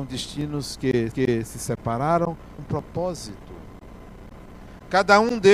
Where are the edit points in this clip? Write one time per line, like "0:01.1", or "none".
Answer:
0:01.1
0:02.6

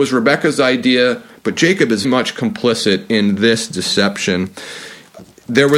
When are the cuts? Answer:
0:02.0

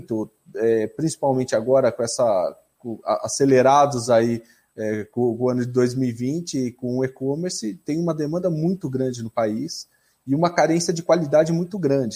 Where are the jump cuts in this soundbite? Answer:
none

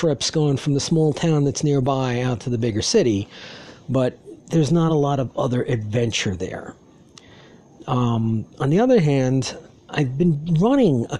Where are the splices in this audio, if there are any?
none

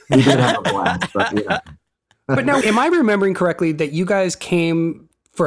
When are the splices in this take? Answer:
0:02.6

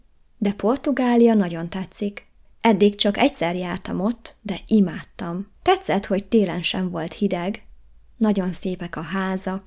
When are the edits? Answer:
0:05.6

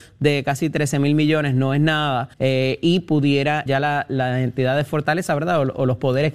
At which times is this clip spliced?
0:02.3
0:03.7

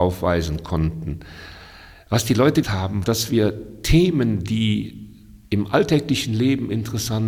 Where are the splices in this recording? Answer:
0:02.6
0:03.0
0:05.4

